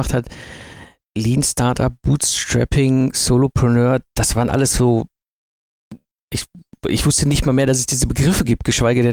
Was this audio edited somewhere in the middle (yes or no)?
no